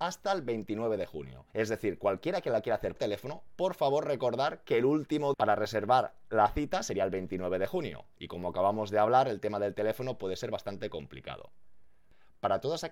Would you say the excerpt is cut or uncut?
cut